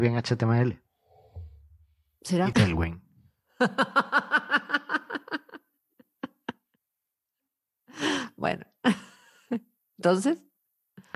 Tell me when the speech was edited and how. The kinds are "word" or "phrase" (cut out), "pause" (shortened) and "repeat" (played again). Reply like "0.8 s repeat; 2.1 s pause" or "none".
2.5 s phrase